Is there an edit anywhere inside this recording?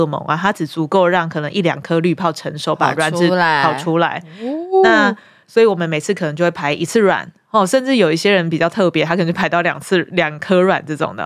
no; 0 cuts

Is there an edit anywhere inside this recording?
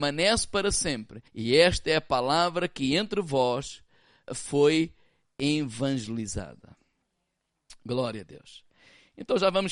yes; 2 cuts; at 1.3 s, 4.3 s

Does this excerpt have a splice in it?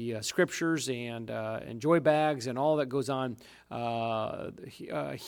no; 0 cuts

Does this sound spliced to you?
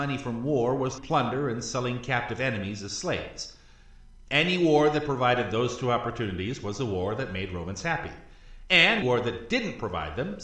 yes; 2 cuts; at 1.0 s, 9.0 s

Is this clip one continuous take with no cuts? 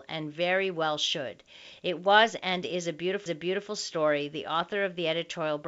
no; 1 cut; at 3.3 s

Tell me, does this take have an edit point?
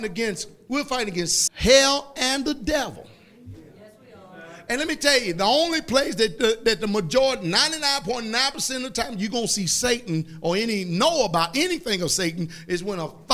yes; 1 cut; at 1.5 s

